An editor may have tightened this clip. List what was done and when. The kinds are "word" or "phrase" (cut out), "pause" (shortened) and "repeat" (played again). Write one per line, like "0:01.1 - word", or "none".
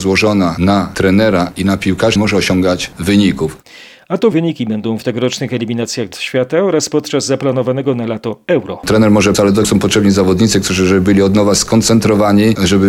0:02.2 - word
0:04.3 - word
0:05.0 - word
0:06.1 - word
0:09.3 - word
0:09.6 - word